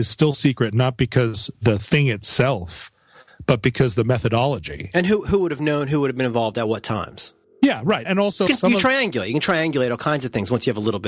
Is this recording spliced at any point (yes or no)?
yes